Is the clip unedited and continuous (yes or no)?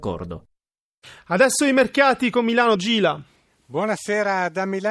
no